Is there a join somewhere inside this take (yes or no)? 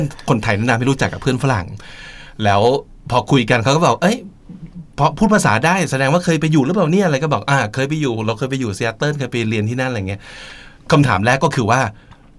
no